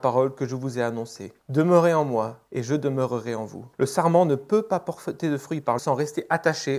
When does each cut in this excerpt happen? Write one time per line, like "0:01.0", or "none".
0:01.4
0:02.5
0:03.7
0:05.8